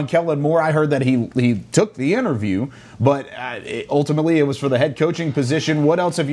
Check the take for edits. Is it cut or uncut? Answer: uncut